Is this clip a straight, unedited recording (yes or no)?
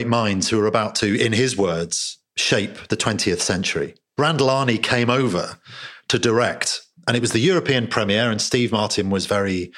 yes